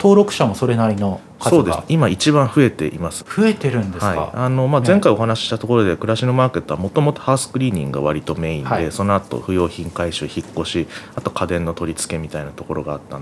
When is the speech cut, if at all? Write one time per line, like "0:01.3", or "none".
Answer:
0:03.2

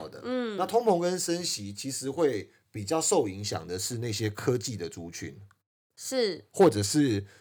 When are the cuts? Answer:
none

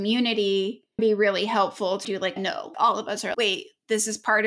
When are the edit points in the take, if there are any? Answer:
0:01.0
0:02.0
0:02.4
0:02.7
0:03.3

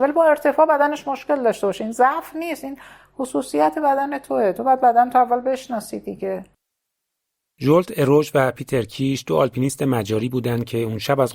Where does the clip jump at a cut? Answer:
none

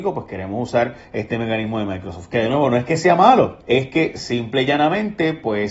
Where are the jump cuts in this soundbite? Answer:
0:01.0
0:03.6

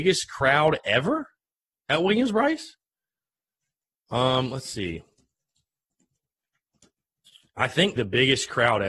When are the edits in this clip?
0:08.0

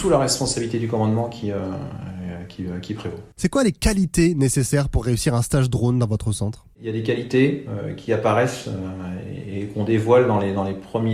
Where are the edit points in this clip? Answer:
0:03.3

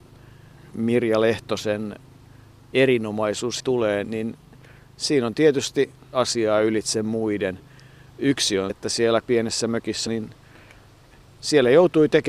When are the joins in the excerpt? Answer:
0:03.6
0:04.0
0:06.1
0:08.7
0:09.2
0:10.1

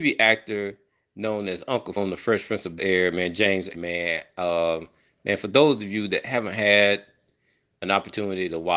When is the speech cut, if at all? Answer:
0:02.0
0:02.8
0:03.7

